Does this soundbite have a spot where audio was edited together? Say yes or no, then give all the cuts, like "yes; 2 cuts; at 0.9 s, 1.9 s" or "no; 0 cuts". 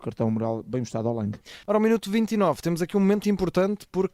yes; 2 cuts; at 1.6 s, 3.2 s